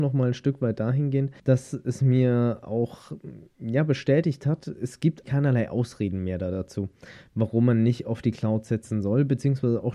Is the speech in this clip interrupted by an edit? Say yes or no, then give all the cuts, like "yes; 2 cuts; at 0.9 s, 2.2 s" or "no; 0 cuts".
yes; 2 cuts; at 1.4 s, 5.2 s